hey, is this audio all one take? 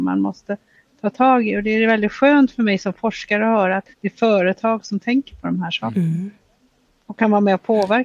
no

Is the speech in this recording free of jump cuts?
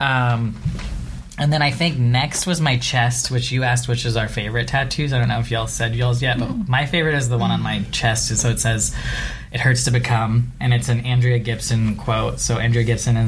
yes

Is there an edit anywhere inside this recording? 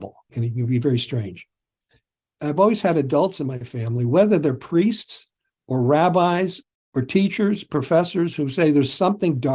no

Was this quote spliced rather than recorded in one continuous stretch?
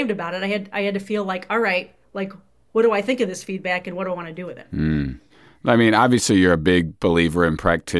no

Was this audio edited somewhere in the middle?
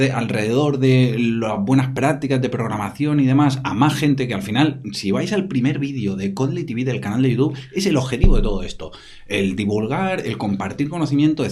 no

